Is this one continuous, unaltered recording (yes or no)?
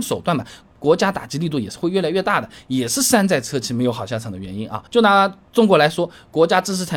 no